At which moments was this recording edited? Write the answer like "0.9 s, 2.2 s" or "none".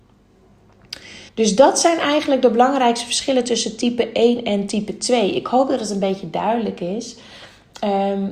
1.3 s